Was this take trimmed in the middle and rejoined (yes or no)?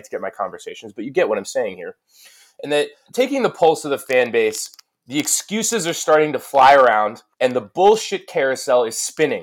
yes